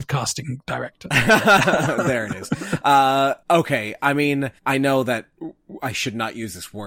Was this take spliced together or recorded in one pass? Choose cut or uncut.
cut